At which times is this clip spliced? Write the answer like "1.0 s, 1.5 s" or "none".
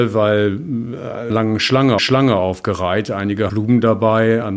1.3 s, 2.0 s, 3.5 s